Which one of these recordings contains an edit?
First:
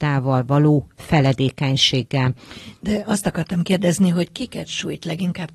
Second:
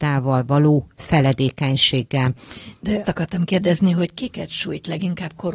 second; 1 cut; at 3.0 s

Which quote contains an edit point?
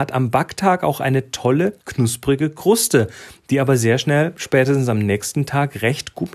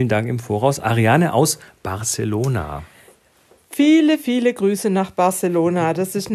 first; 1 cut; at 1.8 s

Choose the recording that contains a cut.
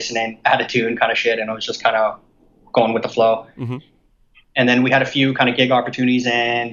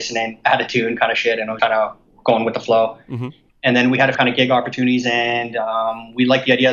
second; 4 cuts; at 1.6 s, 2.1 s, 3.5 s, 4.1 s

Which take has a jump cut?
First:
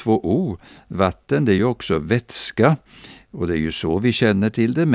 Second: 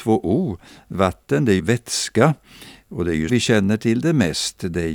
second; 2 cuts; at 1.6 s, 3.3 s

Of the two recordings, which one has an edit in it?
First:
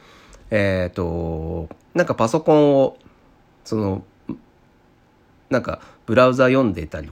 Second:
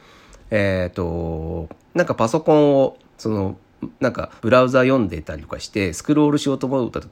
second; 3 cuts; at 3.0 s, 4.0 s, 4.4 s

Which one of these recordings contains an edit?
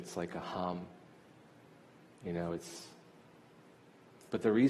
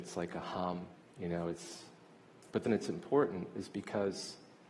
second; 3 cuts; at 0.9 s, 2.1 s, 2.7 s

